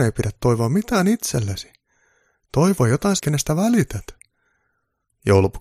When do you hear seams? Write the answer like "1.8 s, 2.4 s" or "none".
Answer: 3.2 s